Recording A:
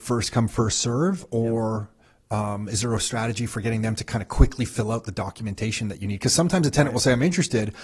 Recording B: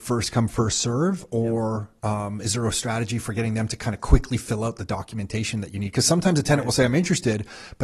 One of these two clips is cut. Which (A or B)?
B